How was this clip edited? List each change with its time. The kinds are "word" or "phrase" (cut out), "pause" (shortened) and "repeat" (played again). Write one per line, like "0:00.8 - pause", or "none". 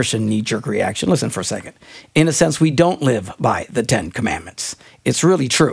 none